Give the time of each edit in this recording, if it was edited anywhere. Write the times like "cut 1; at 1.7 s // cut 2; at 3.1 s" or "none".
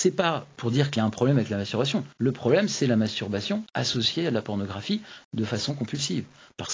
cut 1; at 2.1 s